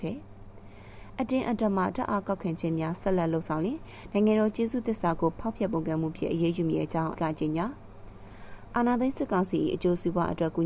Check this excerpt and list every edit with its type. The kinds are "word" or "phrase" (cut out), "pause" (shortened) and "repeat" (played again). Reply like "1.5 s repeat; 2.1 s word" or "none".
7.2 s word

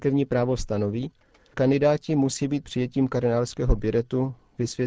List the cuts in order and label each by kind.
1.5 s word; 2.6 s word

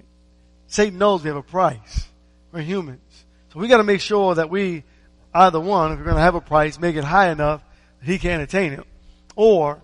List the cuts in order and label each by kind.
none

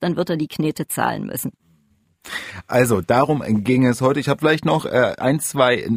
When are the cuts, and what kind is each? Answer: none

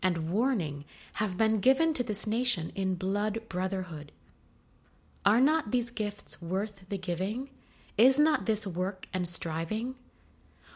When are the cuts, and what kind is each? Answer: none

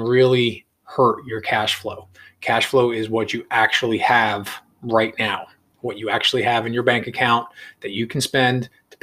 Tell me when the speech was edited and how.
none

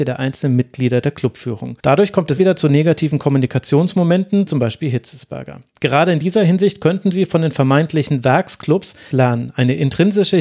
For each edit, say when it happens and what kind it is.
1.8 s pause; 2.4 s word; 4.5 s phrase; 9.1 s word

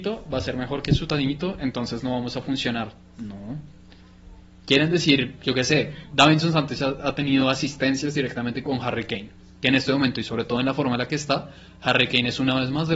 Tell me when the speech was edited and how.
none

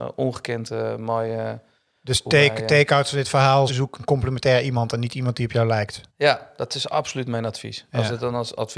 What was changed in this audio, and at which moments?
3.7 s word; 6.1 s pause

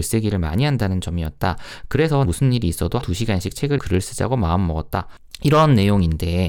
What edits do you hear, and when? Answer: 2.2 s word; 3.0 s word; 3.8 s word

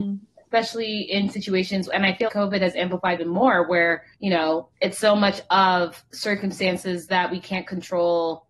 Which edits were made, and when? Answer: 2.3 s word; 3.2 s phrase; 4.1 s pause; 4.7 s pause

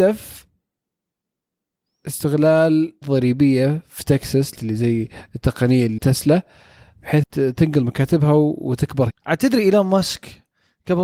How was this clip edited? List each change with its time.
3.0 s word; 4.6 s word; 6.0 s word; 7.2 s word; 9.1 s word

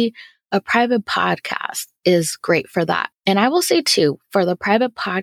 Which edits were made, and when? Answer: 3.2 s pause

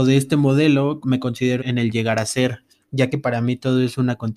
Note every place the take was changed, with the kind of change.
1.0 s word; 1.6 s word

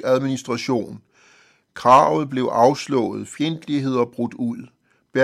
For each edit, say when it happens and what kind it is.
none

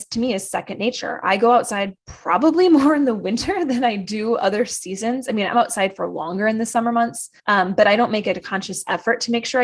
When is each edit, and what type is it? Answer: 2.0 s pause; 7.4 s pause

